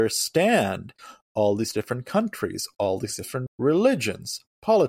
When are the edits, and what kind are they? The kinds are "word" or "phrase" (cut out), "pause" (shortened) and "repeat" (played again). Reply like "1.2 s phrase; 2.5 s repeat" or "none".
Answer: 3.5 s word